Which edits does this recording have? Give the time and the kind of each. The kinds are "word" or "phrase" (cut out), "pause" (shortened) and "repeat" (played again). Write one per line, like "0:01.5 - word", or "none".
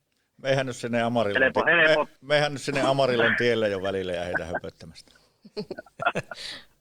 0:02.1 - pause